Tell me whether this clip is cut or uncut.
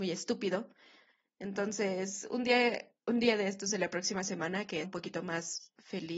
cut